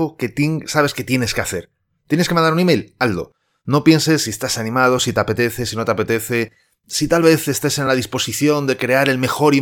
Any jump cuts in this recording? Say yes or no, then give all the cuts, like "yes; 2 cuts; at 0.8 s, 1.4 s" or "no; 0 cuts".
no; 0 cuts